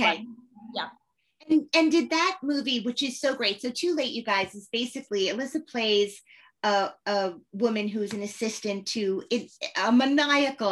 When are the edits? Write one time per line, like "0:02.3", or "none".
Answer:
none